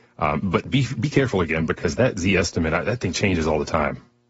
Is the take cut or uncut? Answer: uncut